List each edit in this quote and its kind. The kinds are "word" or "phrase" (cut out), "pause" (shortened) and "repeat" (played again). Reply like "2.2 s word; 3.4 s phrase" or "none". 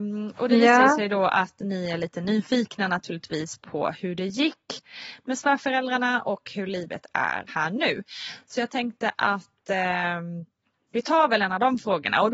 7.5 s word